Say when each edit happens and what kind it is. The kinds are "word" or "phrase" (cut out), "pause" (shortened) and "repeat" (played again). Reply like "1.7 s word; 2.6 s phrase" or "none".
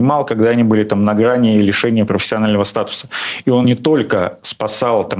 3.6 s word